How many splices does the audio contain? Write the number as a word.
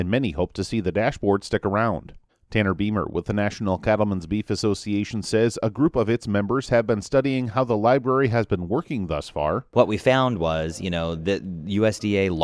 one